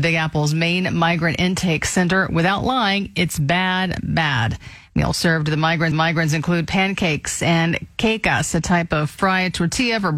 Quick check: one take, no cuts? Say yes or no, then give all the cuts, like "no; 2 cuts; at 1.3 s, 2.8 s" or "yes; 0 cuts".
no; 1 cut; at 5.9 s